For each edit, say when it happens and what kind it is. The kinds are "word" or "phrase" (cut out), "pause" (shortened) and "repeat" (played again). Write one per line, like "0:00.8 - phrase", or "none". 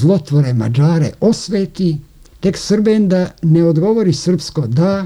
0:02.3 - pause